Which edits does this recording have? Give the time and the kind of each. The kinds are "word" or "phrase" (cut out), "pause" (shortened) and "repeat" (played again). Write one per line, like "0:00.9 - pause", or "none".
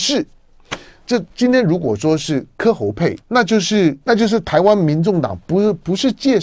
0:01.3 - pause
0:03.2 - pause
0:04.0 - pause